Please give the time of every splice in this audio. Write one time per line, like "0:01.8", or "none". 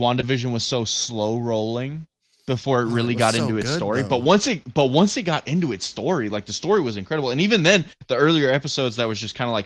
none